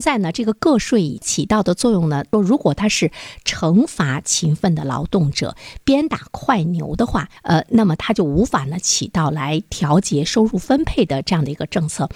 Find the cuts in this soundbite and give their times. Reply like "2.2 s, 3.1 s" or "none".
7.4 s